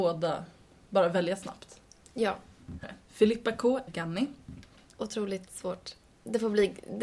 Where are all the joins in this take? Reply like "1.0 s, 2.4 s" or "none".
2.8 s, 3.9 s